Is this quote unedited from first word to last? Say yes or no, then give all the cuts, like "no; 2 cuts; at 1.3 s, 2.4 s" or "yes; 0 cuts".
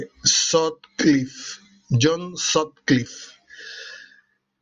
yes; 0 cuts